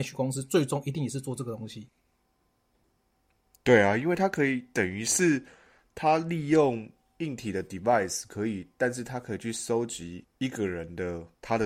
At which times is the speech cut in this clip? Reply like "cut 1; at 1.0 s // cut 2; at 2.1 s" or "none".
none